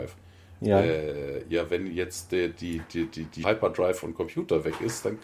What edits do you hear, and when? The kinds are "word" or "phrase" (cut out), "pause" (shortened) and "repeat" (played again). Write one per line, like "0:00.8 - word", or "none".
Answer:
0:03.4 - phrase